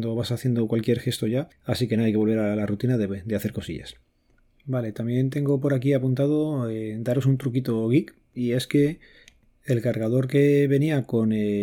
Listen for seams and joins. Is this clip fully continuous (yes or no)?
yes